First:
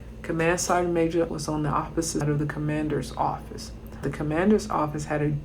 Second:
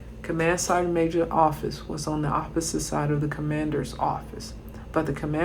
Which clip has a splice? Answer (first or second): first